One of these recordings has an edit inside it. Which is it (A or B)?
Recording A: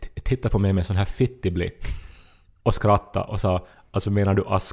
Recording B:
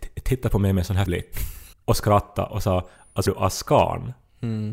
B